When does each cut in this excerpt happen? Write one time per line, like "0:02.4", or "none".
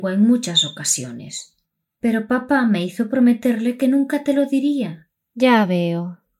none